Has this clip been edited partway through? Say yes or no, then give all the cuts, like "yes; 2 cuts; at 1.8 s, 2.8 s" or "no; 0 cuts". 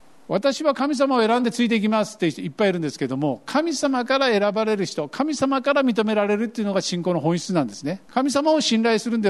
yes; 1 cut; at 8.1 s